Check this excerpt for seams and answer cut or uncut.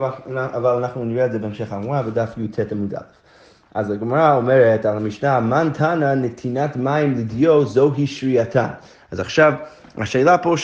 uncut